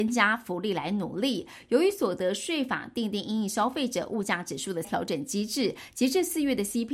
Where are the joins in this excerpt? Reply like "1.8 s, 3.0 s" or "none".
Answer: 4.8 s